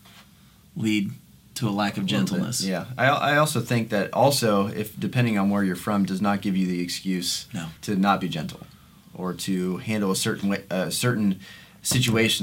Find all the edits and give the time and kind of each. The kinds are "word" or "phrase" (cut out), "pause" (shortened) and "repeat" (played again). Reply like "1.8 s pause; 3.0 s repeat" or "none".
7.8 s pause

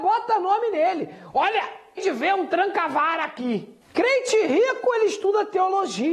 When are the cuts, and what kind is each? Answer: 2.0 s word; 3.8 s pause

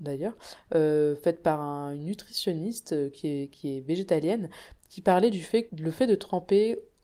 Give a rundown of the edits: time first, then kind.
5.7 s word

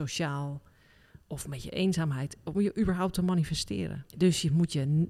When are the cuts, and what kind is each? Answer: 4.1 s pause

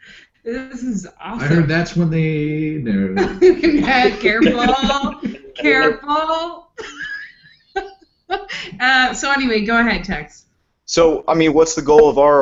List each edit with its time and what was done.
none

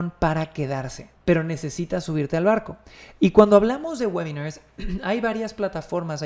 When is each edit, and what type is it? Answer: 1.2 s pause

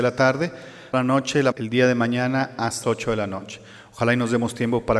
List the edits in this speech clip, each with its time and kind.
0.9 s word; 1.5 s word; 2.8 s word

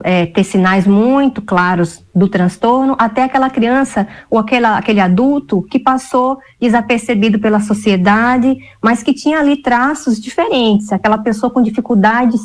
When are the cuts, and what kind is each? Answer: none

